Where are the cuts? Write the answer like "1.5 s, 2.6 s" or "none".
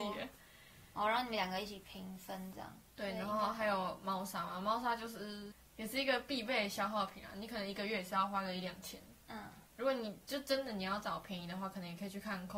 9.2 s